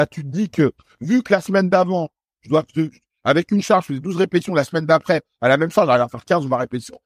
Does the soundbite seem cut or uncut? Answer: uncut